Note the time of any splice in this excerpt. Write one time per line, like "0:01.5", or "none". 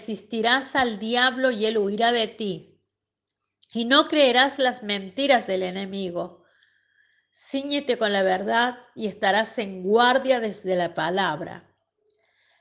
none